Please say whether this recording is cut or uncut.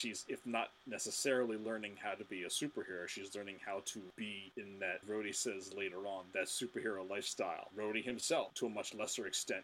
cut